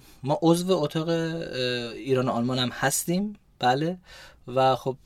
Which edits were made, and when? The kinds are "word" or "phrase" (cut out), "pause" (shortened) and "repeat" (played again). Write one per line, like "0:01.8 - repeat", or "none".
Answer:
none